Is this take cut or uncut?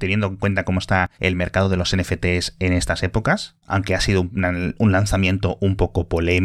cut